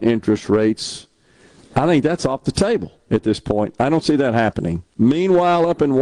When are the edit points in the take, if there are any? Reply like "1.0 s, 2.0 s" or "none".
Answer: none